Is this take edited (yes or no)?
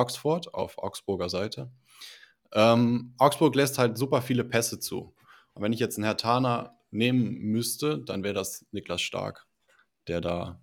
no